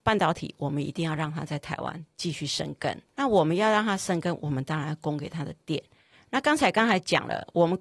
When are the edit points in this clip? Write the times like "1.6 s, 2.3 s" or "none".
3.1 s